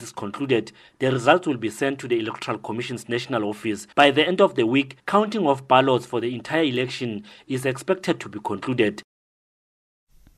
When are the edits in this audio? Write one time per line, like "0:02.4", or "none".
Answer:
0:03.9
0:05.0